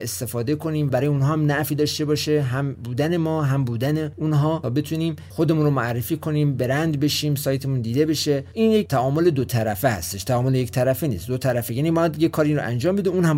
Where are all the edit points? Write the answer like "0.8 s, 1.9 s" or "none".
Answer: none